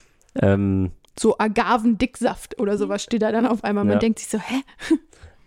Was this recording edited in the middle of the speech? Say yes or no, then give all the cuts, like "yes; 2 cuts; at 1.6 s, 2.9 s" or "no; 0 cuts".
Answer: no; 0 cuts